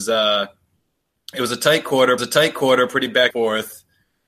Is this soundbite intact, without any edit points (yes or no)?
no